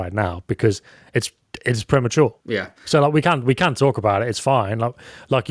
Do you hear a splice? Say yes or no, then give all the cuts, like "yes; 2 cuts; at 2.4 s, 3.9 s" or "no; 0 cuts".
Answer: yes; 1 cut; at 2.4 s